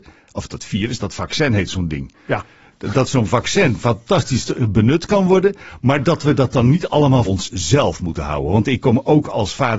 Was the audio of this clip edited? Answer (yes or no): yes